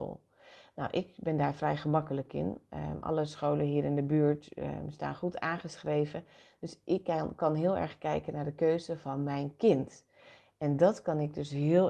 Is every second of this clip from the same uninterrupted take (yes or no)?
yes